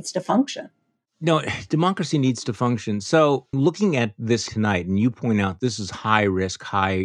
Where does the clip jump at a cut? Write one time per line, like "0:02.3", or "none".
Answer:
0:03.5
0:04.5